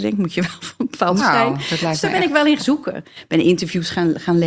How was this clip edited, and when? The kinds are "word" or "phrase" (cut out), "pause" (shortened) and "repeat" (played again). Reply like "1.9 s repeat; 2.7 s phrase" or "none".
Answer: 1.2 s word; 2.6 s word

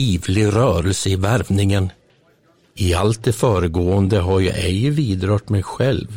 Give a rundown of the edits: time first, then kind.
none

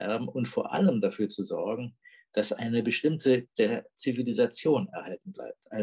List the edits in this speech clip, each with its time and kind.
3.5 s word

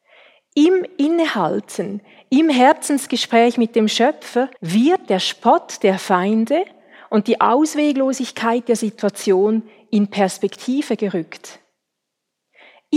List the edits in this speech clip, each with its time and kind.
4.6 s pause

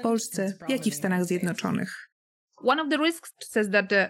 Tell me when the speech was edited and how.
none

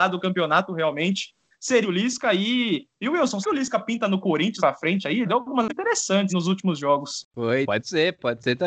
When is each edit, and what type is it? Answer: 1.5 s word; 1.8 s word; 3.4 s word; 4.6 s word; 5.2 s word; 5.7 s word; 6.3 s word; 7.6 s word

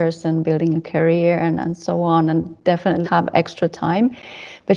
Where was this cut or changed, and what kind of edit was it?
3.0 s word

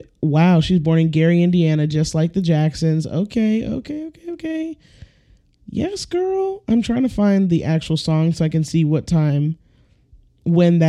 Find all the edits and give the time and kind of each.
none

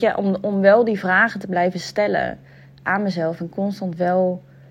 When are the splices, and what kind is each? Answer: none

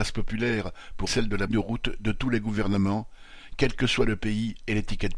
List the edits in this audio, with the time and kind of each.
1.1 s word; 1.5 s phrase

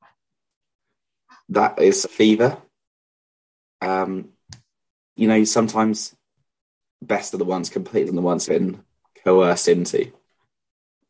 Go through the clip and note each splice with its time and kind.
2.0 s word; 5.2 s word; 7.3 s word; 8.1 s word; 8.5 s word

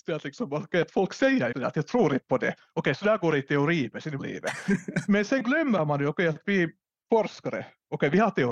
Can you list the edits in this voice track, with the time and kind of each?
1.5 s word; 4.2 s word

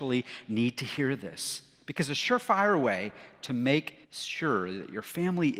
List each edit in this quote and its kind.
4.0 s pause

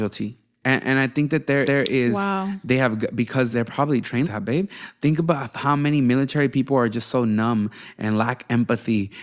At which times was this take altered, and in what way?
1.6 s repeat; 3.5 s word; 4.2 s word

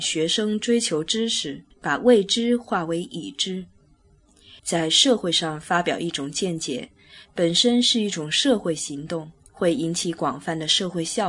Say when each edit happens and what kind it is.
1.7 s pause; 4.6 s pause; 9.5 s pause

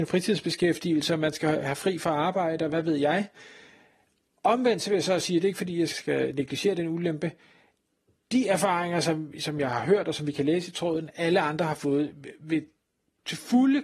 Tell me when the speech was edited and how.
5.9 s word

